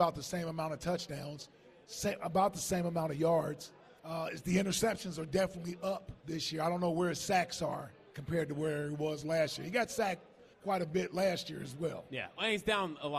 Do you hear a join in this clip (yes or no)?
yes